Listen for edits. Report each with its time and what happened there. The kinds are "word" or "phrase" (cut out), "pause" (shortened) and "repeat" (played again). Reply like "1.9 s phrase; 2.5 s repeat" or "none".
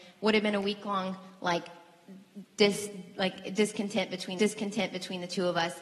4.4 s repeat